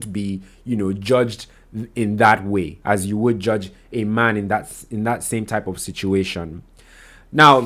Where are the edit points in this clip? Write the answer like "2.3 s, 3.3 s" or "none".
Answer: 2.8 s